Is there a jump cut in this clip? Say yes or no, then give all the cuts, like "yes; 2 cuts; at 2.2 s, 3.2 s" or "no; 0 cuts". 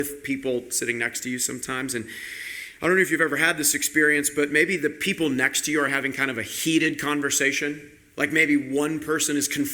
no; 0 cuts